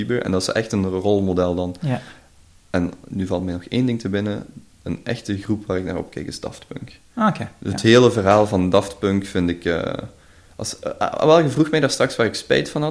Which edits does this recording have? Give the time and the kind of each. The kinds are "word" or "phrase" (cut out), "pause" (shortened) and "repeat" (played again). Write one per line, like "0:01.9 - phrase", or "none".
none